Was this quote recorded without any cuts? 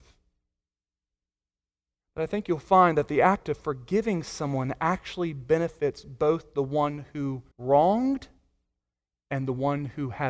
no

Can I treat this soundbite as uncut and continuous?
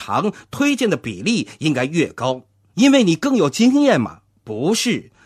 yes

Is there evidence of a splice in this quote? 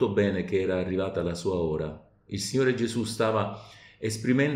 no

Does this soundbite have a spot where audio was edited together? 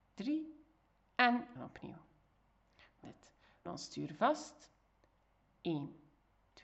yes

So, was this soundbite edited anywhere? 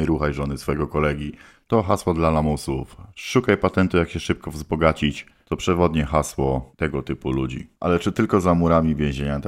no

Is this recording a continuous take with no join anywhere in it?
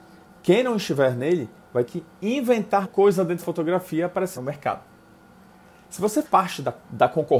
no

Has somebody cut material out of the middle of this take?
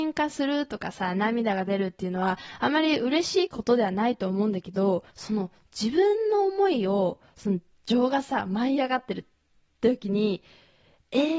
yes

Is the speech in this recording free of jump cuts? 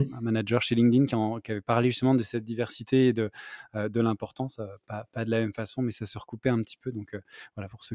yes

